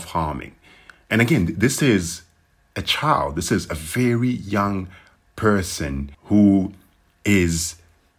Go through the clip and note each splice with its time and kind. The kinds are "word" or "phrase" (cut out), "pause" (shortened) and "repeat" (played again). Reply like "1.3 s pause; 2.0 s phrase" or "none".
6.1 s pause